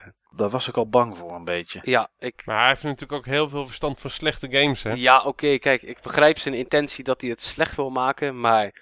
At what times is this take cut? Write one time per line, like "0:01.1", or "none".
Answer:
none